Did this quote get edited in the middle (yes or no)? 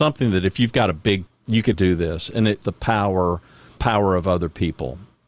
yes